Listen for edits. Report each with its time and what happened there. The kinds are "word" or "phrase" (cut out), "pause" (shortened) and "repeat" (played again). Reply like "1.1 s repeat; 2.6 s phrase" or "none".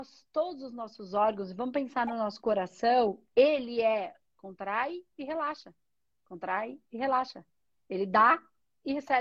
none